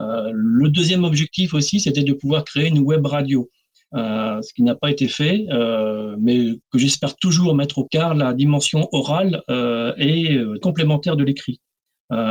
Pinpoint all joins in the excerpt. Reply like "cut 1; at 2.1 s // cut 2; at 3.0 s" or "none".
cut 1; at 6.6 s // cut 2; at 7.9 s // cut 3; at 10.6 s